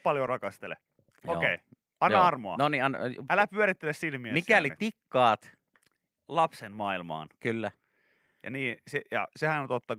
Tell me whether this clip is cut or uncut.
uncut